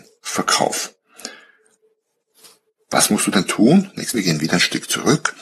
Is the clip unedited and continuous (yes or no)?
no